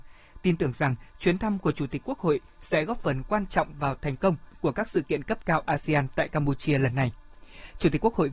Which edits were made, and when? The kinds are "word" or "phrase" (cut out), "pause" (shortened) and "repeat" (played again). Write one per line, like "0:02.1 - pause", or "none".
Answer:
none